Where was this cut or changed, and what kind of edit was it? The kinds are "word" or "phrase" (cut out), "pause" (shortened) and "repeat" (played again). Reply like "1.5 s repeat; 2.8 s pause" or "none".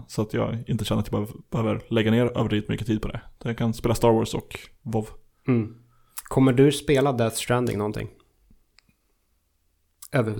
none